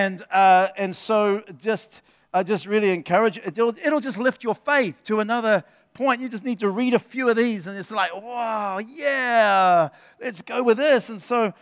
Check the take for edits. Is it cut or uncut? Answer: uncut